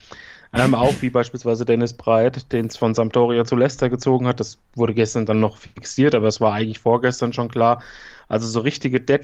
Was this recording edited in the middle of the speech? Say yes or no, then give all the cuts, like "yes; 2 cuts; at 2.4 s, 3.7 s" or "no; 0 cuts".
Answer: yes; 1 cut; at 4.6 s